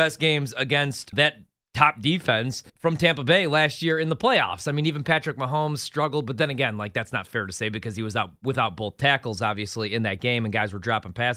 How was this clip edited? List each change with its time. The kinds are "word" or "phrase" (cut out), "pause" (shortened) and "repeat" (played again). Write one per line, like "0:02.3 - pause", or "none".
0:01.1 - word
0:02.7 - pause